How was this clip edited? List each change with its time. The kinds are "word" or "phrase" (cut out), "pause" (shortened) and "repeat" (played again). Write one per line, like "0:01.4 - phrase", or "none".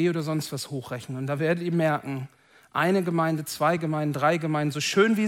none